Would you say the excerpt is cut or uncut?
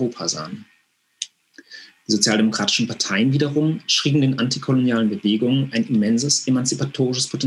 uncut